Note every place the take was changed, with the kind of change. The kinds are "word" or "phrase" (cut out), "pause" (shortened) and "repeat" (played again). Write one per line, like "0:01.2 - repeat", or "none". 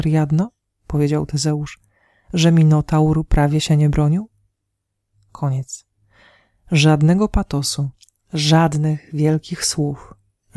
none